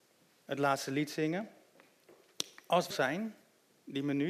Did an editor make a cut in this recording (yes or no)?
yes